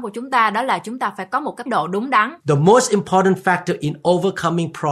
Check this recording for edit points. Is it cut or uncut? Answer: cut